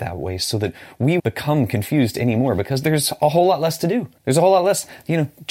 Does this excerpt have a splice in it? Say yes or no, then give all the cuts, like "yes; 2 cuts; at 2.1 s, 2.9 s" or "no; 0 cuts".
yes; 2 cuts; at 1.2 s, 4.2 s